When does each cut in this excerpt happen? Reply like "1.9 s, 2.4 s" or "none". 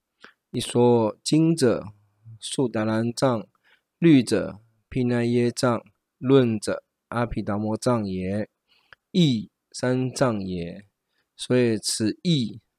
none

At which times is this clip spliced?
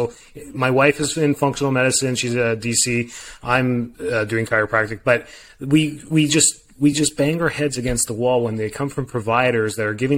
none

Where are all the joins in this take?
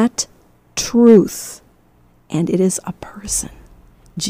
none

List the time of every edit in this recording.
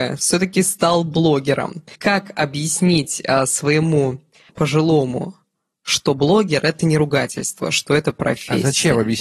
1.9 s, 4.5 s

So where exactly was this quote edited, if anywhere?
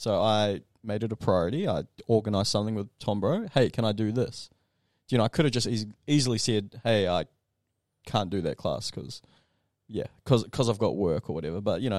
none

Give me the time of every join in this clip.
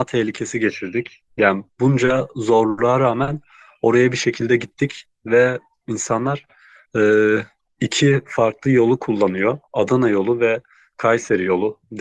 1.3 s

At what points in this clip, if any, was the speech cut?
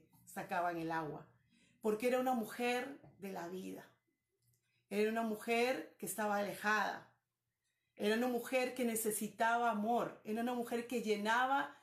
none

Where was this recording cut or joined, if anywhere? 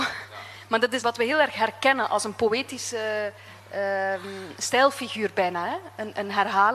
1.0 s

